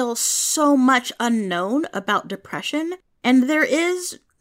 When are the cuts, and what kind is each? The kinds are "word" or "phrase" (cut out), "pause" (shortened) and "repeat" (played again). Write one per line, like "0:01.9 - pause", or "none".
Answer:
none

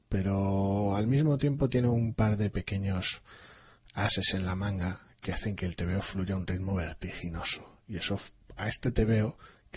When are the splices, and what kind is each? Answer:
none

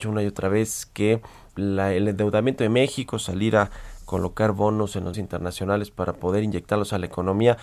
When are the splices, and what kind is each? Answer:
0:01.5 - word
0:05.1 - word

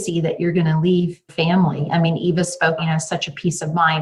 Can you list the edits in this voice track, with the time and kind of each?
0:01.3 - word
0:02.8 - word

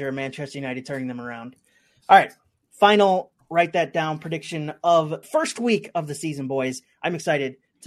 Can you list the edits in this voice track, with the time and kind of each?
0:05.2 - word

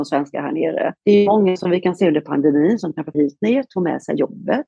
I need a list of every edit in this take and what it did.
0:01.0 - pause
0:03.1 - word

